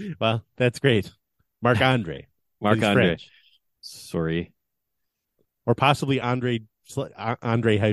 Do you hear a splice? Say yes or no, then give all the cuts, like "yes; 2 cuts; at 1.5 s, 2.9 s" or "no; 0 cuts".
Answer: no; 0 cuts